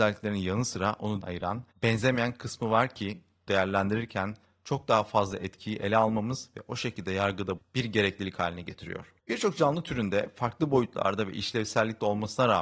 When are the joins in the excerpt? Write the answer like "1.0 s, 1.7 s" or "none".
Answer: 1.2 s, 1.7 s, 3.5 s, 7.6 s, 9.2 s